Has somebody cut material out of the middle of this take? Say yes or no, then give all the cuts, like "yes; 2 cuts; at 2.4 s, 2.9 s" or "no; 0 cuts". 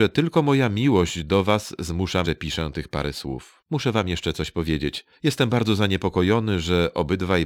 yes; 3 cuts; at 2.2 s, 3.7 s, 5.1 s